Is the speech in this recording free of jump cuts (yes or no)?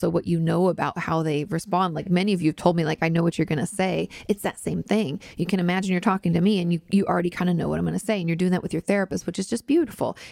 yes